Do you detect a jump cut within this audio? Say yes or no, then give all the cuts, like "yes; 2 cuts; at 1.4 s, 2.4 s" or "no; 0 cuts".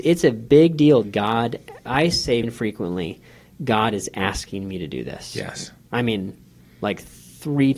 yes; 3 cuts; at 1.0 s, 1.9 s, 2.4 s